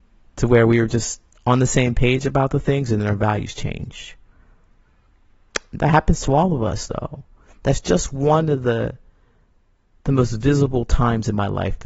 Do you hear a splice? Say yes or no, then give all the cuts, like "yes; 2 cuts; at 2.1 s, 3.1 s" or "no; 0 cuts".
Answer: no; 0 cuts